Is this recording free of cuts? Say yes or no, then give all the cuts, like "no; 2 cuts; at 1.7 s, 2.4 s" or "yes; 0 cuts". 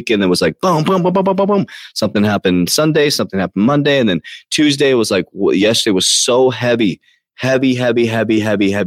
yes; 0 cuts